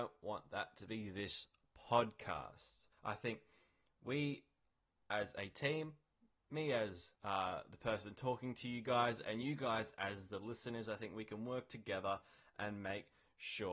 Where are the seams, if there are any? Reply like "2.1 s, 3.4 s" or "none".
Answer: 2.9 s, 7.2 s